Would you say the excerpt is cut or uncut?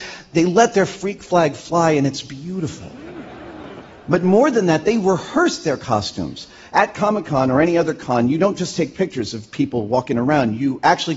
uncut